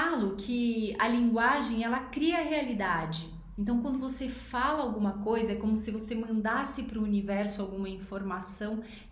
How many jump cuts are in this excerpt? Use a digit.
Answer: 0